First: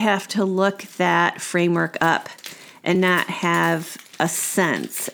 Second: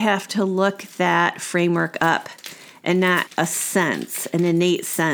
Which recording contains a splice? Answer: second; 1 cut; at 3.3 s

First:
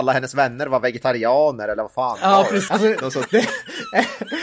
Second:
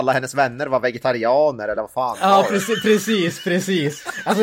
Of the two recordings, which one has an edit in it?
first; 1 cut; at 2.7 s

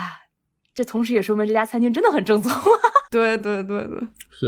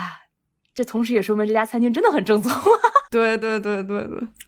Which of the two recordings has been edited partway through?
first; 1 cut; at 3.4 s

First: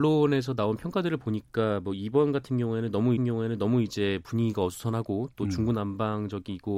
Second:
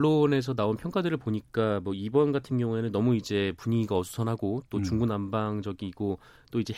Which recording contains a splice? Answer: first; 1 cut; at 3.2 s

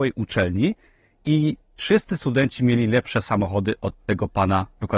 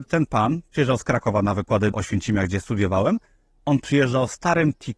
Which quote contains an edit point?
second; 1 cut; at 1.9 s

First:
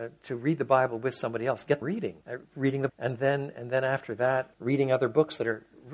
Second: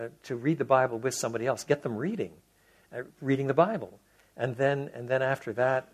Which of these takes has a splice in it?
first; 4 cuts; at 1.8 s, 2.2 s, 2.9 s, 4.5 s

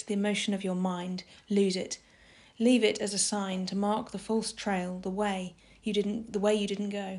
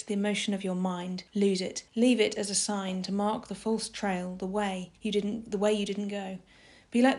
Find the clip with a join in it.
second; 3 cuts; at 1.3 s, 1.9 s, 5.0 s

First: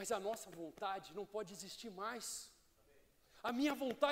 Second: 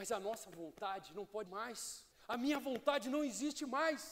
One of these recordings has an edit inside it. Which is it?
second; 2 cuts; at 1.5 s, 2.1 s

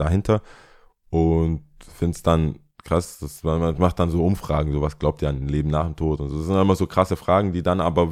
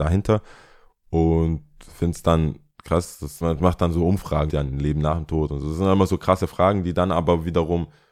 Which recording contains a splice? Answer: second; 2 cuts; at 3.4 s, 4.5 s

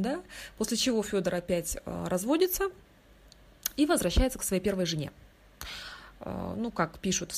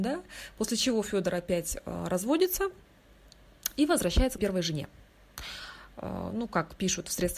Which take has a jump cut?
second; 1 cut; at 4.4 s

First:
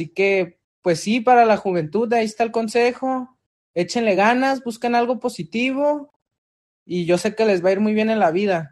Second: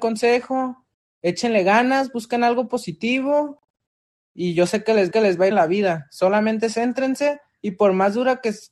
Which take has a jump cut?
second; 2 cuts; at 5.1 s, 5.5 s

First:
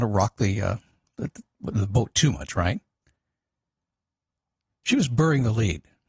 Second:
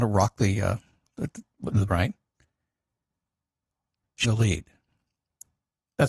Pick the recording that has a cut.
second; 2 cuts; at 1.9 s, 4.2 s

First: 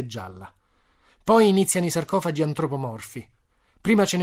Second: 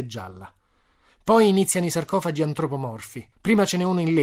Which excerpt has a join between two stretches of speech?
second; 1 cut; at 3.3 s

